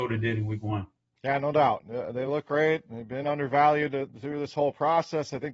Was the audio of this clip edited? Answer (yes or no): no